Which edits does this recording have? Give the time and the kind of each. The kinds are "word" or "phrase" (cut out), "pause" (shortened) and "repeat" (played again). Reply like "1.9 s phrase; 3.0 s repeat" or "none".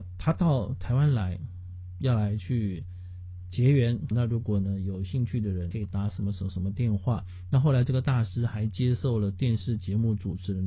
4.1 s word; 5.7 s word